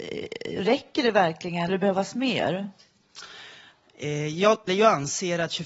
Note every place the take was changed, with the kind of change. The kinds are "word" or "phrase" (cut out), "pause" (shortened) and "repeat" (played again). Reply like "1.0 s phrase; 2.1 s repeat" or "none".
1.7 s phrase; 4.7 s phrase